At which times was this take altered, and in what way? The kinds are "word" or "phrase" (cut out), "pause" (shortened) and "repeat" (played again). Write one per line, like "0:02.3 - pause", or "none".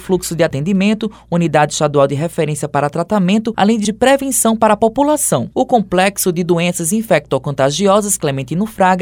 0:03.8 - word

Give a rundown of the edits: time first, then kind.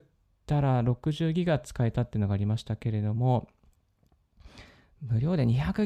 none

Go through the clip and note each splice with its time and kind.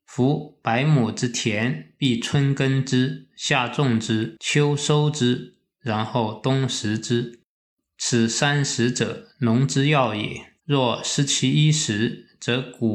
0:09.3 - pause
0:10.6 - pause

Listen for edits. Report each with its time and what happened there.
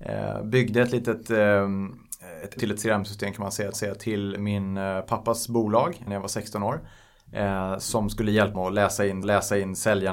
0:02.6 - word
0:03.7 - repeat
0:06.1 - word
0:08.5 - word
0:09.2 - repeat

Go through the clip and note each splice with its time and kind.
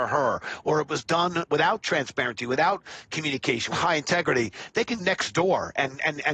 0:01.5 - word
0:03.7 - word
0:05.0 - word

